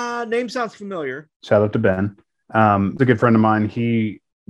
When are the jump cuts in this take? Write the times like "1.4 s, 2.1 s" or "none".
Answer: 1.3 s, 3.0 s